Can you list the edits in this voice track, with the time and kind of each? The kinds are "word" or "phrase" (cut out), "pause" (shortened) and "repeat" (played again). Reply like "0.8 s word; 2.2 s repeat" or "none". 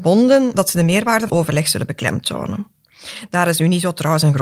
1.3 s word